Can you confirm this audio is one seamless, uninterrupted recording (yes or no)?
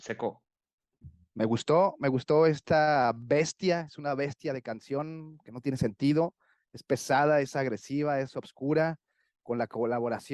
yes